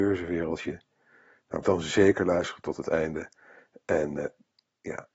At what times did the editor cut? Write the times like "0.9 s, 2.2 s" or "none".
1.6 s